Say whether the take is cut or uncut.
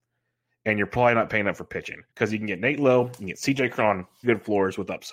cut